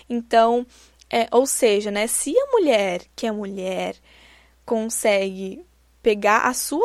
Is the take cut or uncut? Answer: uncut